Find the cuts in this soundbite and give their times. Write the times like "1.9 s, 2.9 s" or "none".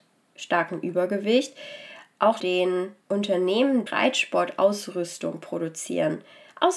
2.4 s, 3.9 s